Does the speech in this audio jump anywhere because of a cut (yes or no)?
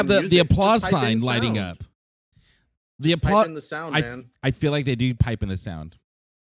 no